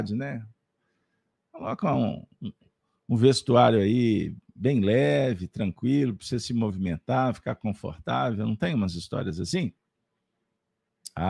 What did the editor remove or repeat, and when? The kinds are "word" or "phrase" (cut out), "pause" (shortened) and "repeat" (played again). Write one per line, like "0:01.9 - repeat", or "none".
none